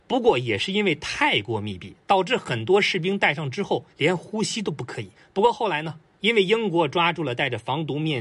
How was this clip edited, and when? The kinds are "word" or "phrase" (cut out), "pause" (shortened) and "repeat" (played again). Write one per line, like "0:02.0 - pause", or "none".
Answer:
0:03.9 - pause
0:05.1 - pause